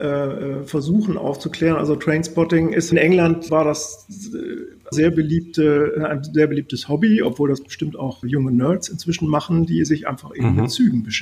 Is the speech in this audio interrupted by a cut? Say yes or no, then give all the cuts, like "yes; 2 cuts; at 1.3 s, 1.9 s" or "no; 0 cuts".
yes; 4 cuts; at 2.9 s, 3.5 s, 4.9 s, 8.2 s